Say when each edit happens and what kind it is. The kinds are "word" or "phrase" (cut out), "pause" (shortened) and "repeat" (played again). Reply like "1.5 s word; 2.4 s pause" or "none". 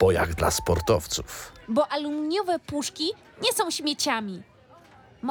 none